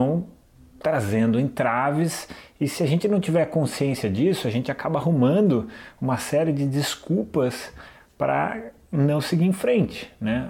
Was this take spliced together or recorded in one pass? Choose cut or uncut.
uncut